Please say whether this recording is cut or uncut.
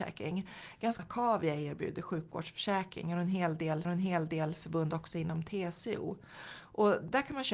cut